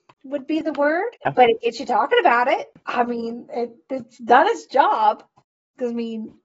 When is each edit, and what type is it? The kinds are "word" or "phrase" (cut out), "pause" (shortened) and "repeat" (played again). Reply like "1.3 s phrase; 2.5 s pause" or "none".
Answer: 1.2 s pause